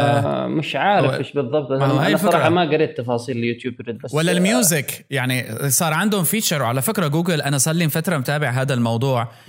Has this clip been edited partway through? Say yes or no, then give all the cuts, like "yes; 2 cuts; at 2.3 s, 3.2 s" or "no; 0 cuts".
no; 0 cuts